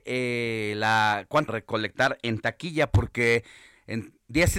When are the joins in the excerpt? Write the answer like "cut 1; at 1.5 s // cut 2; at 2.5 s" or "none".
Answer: cut 1; at 1.5 s